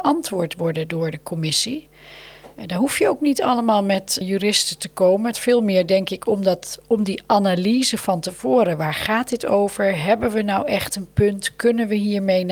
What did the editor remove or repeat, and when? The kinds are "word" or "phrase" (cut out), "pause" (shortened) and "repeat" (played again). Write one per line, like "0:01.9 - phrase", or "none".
0:02.5 - pause
0:04.2 - word
0:05.3 - word